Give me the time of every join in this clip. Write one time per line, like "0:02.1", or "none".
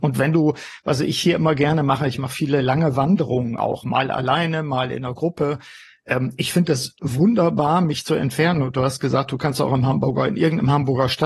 none